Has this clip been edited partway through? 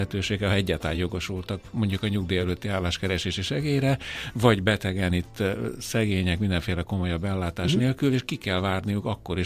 no; 0 cuts

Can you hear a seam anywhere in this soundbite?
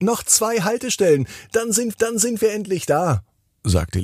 yes; 1 cut; at 1.9 s

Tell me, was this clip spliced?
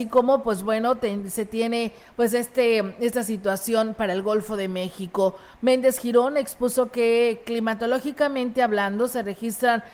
no; 0 cuts

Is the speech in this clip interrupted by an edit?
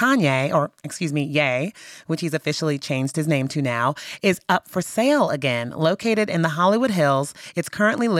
no; 0 cuts

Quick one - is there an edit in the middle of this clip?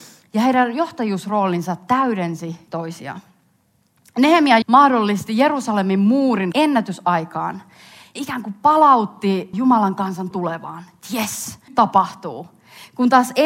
yes; 7 cuts; at 2.7 s, 4.6 s, 6.5 s, 8.2 s, 9.5 s, 10.3 s, 11.7 s

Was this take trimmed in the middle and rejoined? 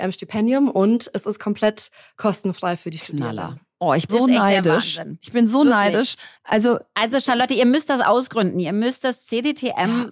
yes; 2 cuts; at 4.1 s, 6.4 s

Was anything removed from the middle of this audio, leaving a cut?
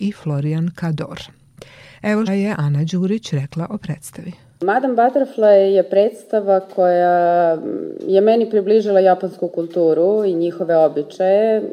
yes; 1 cut; at 2.3 s

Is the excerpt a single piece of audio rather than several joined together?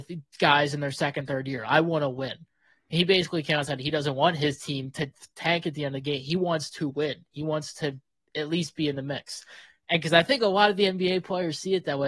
yes; 0 cuts

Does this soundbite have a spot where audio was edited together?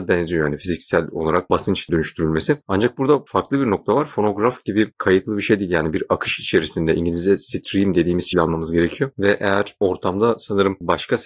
yes; 2 cuts; at 1.9 s, 8.3 s

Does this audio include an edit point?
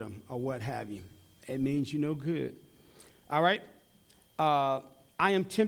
no; 0 cuts

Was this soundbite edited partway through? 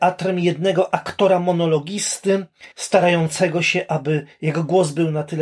yes; 1 cut; at 2.7 s

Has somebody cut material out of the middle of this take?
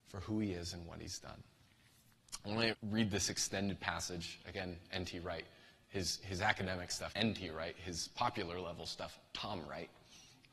yes; 2 cuts; at 2.7 s, 7.1 s

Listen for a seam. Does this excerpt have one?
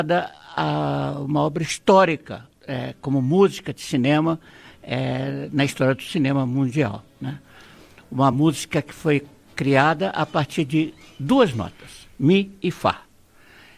no; 0 cuts

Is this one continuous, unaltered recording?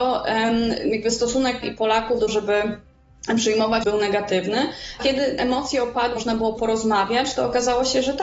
no; 6 cuts; at 1.6 s, 2.3 s, 3.8 s, 5.0 s, 6.2 s, 6.6 s

